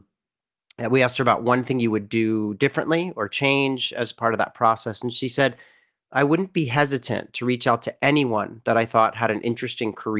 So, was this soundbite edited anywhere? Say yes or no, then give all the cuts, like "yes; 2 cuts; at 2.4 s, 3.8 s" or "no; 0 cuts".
no; 0 cuts